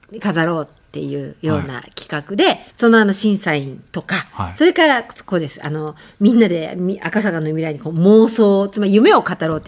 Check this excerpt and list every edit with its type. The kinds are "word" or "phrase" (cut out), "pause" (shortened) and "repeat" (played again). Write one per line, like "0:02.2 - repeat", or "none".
none